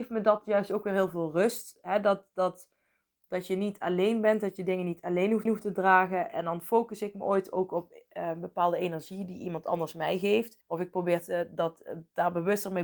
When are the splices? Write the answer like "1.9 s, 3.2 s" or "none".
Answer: 5.5 s, 10.6 s

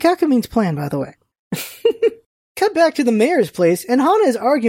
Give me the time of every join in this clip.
none

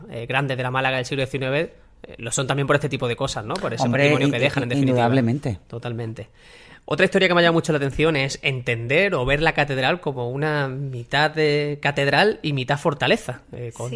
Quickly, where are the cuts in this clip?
none

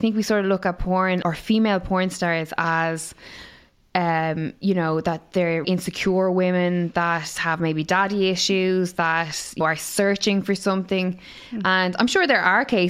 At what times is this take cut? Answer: 1.2 s, 5.6 s, 9.6 s

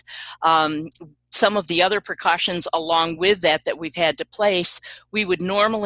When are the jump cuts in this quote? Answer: none

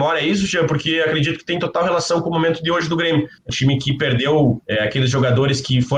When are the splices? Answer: 3.5 s, 4.6 s

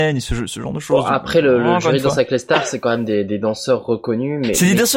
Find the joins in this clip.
none

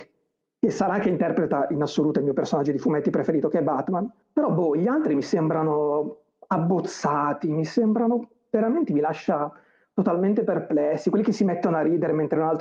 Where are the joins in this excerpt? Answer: none

